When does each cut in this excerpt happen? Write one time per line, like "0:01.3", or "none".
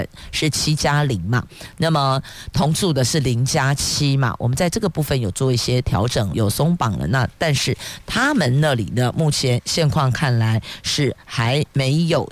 0:06.3